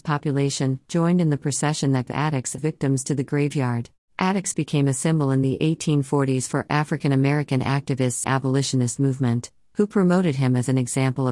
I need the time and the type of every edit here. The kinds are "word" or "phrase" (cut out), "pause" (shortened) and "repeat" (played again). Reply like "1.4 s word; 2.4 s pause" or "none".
2.1 s phrase; 2.6 s phrase; 4.0 s pause; 8.2 s phrase